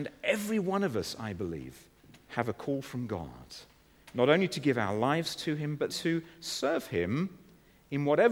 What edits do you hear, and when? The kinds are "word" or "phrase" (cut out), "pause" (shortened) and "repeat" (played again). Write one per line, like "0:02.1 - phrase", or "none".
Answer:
0:02.0 - pause
0:05.9 - word